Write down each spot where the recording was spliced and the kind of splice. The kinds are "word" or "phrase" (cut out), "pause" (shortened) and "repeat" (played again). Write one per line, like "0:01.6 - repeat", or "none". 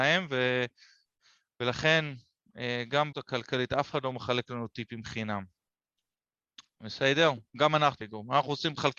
0:03.1 - word
0:08.0 - word